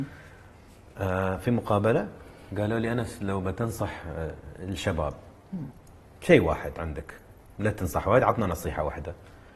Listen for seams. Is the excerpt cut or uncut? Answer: uncut